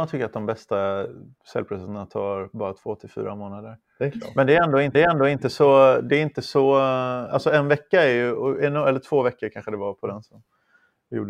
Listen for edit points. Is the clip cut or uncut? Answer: cut